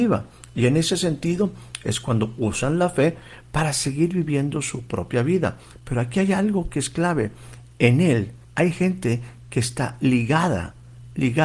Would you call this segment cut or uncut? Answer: cut